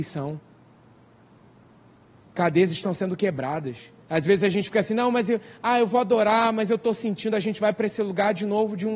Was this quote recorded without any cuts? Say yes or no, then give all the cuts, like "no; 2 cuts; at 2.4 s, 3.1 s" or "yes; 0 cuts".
no; 1 cut; at 4.0 s